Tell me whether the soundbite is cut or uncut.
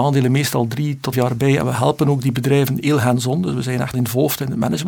cut